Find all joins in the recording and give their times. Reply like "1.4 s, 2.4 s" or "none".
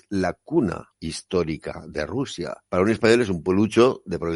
0.9 s, 2.7 s